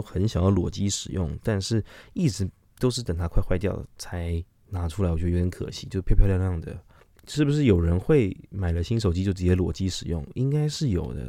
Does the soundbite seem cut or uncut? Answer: uncut